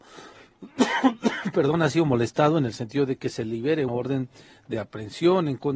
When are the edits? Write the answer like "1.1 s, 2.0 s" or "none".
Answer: 3.9 s